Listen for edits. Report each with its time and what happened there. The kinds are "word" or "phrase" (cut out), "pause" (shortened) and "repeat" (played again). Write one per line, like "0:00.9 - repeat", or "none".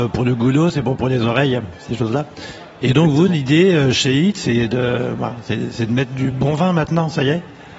none